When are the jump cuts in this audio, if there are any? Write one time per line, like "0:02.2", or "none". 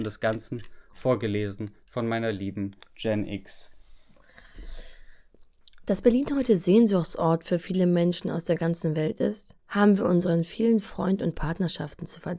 0:09.6

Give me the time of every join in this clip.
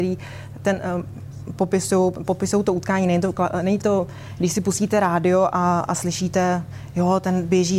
0:03.8

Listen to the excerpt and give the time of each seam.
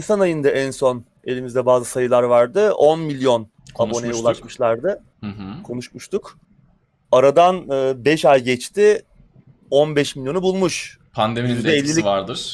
none

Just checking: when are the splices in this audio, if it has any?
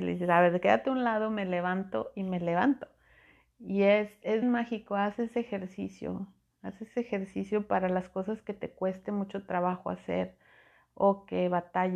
0:04.4

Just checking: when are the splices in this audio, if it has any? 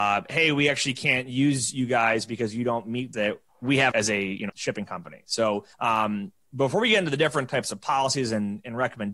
0:03.1
0:03.5
0:03.9
0:04.5
0:05.7

